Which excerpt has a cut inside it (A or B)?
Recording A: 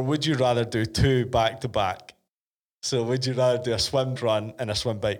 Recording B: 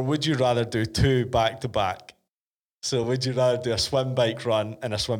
A